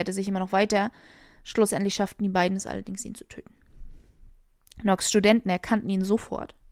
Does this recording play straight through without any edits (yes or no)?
yes